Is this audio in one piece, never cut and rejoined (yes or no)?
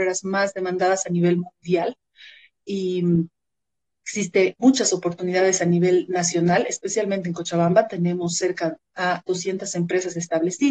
no